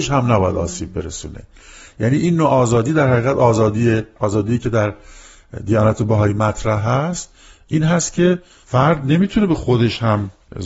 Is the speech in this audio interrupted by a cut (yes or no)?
no